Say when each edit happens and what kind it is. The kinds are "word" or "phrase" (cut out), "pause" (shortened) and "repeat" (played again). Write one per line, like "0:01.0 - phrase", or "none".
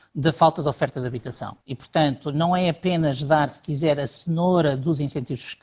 0:01.6 - pause

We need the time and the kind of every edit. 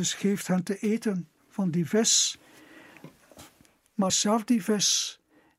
0:04.1 - word

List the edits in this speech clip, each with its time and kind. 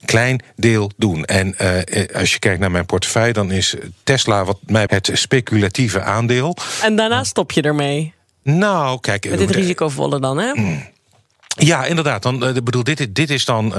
0:04.9 - word

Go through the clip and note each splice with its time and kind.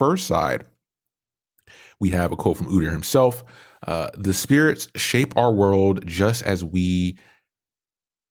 none

